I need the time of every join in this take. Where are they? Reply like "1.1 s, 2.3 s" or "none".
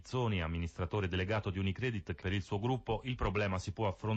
2.2 s

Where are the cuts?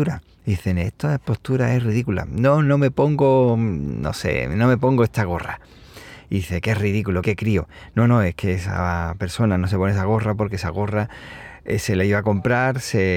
7.2 s

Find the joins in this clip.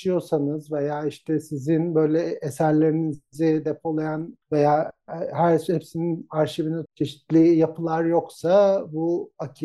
4.4 s, 6.9 s

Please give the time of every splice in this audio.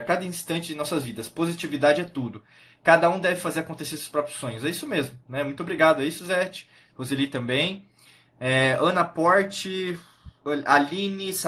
none

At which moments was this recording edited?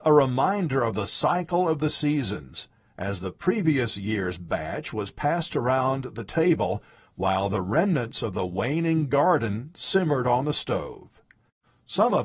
none

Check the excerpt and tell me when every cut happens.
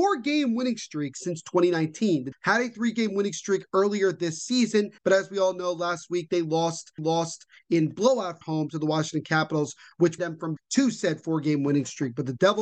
2.3 s, 5.0 s, 7.0 s, 8.4 s, 10.2 s, 10.6 s

